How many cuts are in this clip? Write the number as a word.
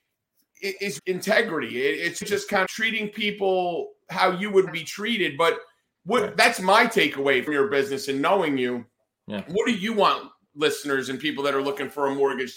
five